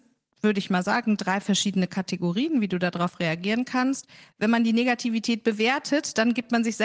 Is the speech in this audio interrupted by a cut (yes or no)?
no